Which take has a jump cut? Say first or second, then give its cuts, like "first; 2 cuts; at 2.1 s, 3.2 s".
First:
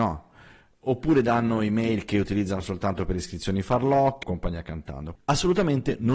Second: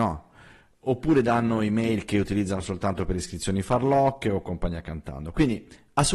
first; 2 cuts; at 4.2 s, 5.1 s